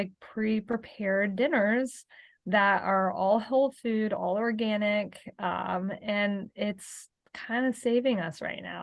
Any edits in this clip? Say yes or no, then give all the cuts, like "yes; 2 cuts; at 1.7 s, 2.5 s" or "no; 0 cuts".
no; 0 cuts